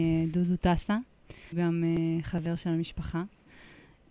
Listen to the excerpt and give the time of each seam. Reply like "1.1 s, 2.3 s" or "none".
1.5 s